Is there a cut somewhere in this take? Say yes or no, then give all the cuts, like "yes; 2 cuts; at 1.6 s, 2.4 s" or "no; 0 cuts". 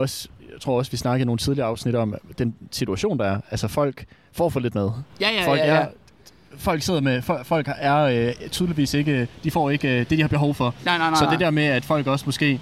no; 0 cuts